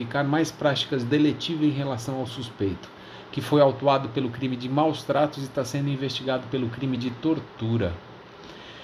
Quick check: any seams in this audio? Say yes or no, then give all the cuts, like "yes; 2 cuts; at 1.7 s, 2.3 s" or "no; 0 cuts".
no; 0 cuts